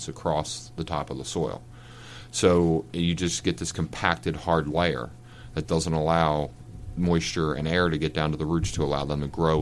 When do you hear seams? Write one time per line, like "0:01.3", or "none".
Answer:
none

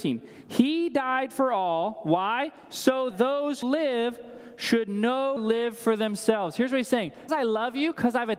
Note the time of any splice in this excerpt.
0:03.1
0:03.6
0:05.4
0:07.3

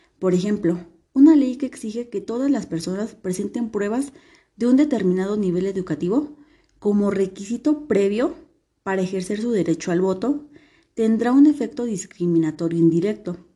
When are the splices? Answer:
none

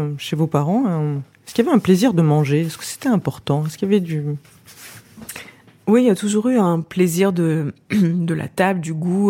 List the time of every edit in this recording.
none

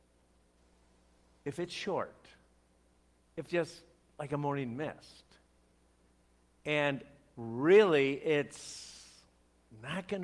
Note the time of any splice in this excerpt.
0:03.5

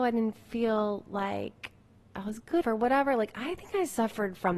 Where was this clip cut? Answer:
0:02.6

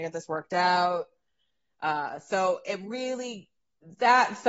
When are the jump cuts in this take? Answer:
none

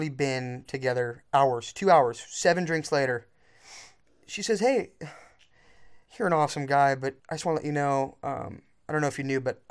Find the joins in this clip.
0:04.1
0:06.1
0:07.2

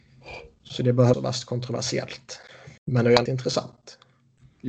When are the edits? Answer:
0:01.1
0:02.8
0:03.3

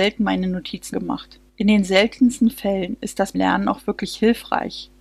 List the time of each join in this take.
0:00.9
0:01.5
0:03.3

